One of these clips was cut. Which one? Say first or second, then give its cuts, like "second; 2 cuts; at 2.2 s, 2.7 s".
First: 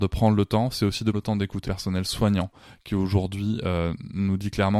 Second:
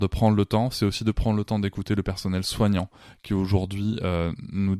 first; 2 cuts; at 1.1 s, 1.6 s